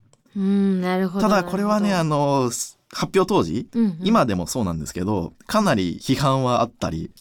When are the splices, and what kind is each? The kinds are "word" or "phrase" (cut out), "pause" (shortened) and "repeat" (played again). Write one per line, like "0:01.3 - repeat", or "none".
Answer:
0:03.7 - pause